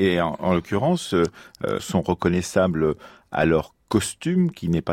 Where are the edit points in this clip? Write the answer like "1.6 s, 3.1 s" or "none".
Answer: 1.8 s